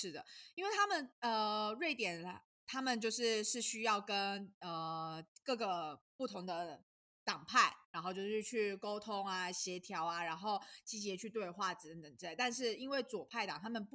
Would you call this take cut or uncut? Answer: uncut